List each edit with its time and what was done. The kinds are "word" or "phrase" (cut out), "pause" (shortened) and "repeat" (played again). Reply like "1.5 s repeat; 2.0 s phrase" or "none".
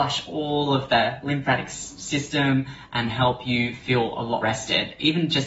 4.4 s word